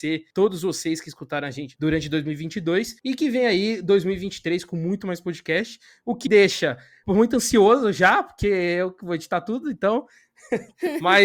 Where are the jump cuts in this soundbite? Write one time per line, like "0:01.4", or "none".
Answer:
0:06.3